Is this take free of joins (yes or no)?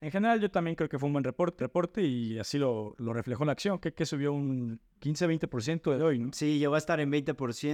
no